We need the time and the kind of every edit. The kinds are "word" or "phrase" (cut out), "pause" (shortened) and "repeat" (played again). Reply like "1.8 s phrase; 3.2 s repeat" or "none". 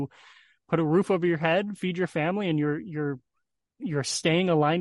none